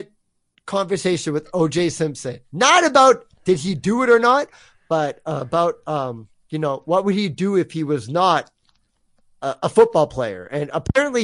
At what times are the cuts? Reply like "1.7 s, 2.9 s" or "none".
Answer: none